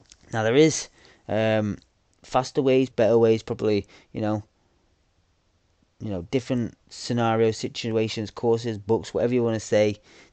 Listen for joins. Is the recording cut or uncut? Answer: cut